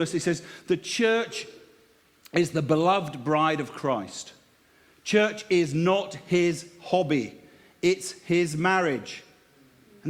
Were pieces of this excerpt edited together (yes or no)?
no